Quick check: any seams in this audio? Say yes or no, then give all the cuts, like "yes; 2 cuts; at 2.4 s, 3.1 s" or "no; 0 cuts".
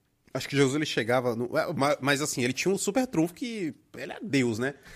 no; 0 cuts